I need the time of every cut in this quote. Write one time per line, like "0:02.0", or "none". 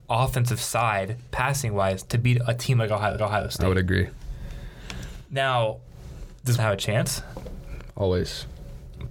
0:03.2
0:06.6